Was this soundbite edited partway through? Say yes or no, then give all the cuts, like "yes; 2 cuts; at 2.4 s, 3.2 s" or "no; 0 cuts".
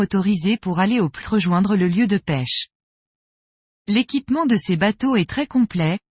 yes; 1 cut; at 1.2 s